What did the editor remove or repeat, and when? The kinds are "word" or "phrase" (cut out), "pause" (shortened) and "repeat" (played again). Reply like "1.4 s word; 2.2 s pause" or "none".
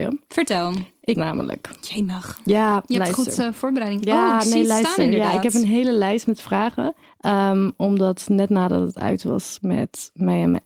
1.1 s phrase; 7.0 s pause